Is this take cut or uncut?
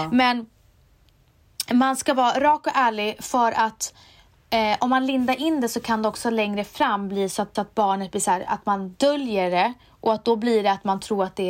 cut